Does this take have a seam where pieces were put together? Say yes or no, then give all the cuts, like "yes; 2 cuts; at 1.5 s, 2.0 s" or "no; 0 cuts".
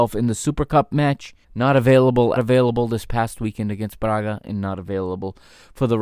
yes; 2 cuts; at 1.4 s, 2.4 s